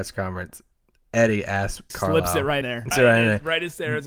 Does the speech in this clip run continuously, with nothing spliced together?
no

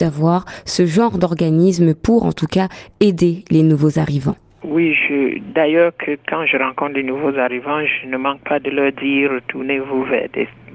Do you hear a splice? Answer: yes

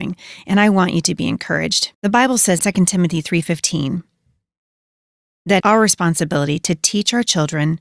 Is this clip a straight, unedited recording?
no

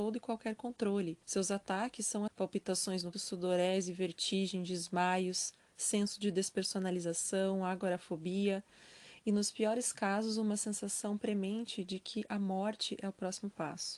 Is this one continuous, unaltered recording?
no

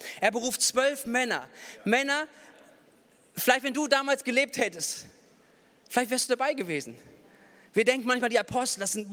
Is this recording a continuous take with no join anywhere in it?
yes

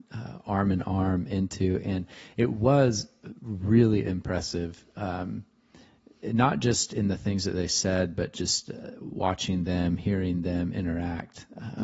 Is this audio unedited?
yes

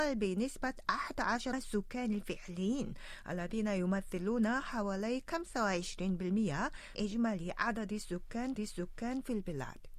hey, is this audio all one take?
no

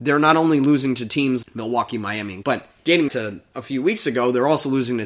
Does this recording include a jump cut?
yes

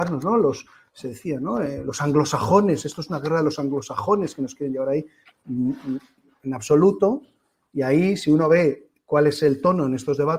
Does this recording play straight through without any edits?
yes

